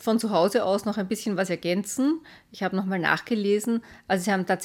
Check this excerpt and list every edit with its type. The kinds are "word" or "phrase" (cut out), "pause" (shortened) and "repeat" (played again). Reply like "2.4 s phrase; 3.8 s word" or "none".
none